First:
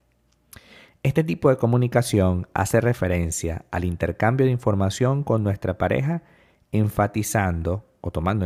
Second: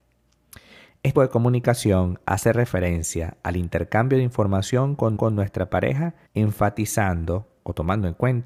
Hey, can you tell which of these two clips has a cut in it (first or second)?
second